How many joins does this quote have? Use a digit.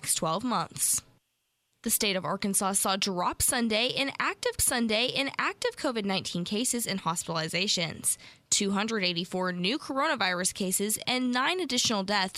1